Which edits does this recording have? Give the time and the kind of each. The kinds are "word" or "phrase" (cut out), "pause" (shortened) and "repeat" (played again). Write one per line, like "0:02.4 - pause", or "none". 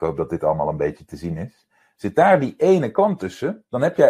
none

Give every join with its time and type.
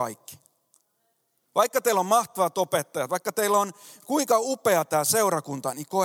none

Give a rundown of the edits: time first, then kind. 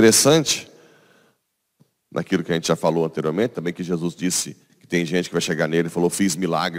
none

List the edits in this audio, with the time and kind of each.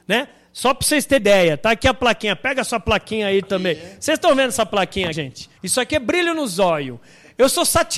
0:01.2 - word
0:05.1 - word
0:05.6 - pause

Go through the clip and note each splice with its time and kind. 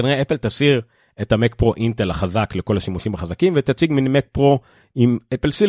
none

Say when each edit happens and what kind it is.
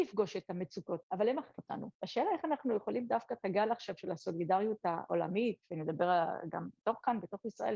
0:01.0 - word
0:01.6 - word
0:01.9 - pause

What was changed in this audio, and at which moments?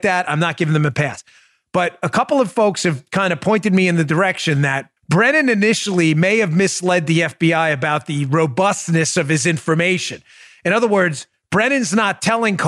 0:05.0 - pause

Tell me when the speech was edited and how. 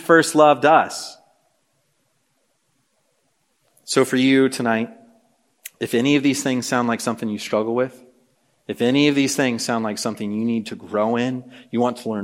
none

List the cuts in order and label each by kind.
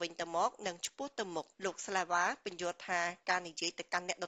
0:01.5 - pause

